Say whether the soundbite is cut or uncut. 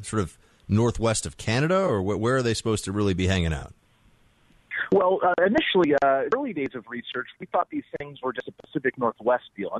cut